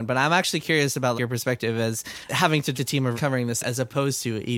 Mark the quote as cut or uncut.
cut